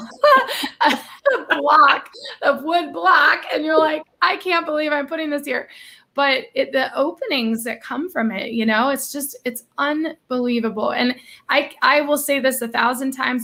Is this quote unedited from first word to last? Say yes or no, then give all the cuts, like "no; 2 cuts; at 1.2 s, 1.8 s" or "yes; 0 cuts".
yes; 0 cuts